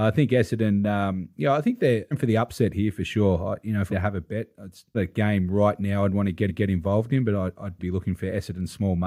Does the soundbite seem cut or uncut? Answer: cut